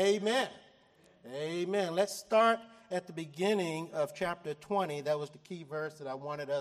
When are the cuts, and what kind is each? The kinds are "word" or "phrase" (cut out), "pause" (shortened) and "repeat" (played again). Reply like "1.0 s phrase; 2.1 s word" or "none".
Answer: 5.3 s word